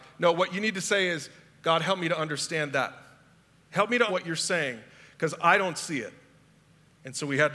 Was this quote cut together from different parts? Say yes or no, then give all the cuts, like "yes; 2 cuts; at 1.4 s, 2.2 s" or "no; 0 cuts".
yes; 1 cut; at 4.1 s